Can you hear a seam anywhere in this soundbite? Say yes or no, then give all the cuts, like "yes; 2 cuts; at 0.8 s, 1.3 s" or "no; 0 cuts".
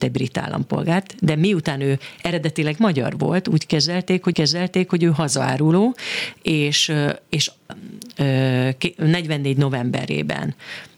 yes; 2 cuts; at 4.3 s, 7.7 s